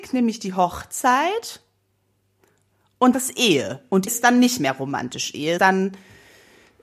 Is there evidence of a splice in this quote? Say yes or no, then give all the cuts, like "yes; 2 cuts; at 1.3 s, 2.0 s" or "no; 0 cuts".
yes; 3 cuts; at 3.1 s, 4.1 s, 5.6 s